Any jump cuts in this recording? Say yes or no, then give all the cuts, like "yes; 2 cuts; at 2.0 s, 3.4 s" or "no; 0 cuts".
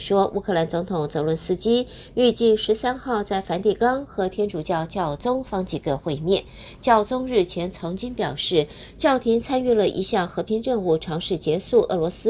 no; 0 cuts